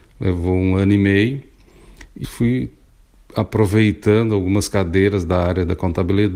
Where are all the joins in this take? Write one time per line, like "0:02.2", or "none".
0:02.2